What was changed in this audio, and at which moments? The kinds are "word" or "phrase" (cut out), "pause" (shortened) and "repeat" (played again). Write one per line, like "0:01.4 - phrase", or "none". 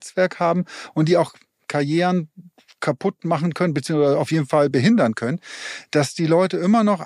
none